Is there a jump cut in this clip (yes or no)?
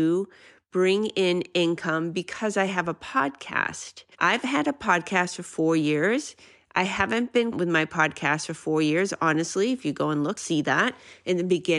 yes